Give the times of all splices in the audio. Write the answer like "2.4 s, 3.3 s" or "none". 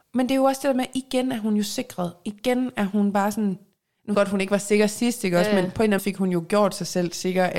4.1 s, 6.0 s